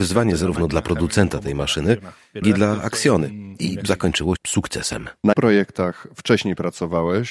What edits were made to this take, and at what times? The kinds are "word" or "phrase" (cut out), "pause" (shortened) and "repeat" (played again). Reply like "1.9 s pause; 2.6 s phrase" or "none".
2.4 s word; 4.4 s word; 5.3 s word